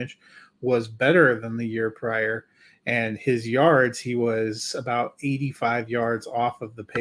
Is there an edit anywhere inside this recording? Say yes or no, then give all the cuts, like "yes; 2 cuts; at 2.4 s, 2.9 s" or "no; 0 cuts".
no; 0 cuts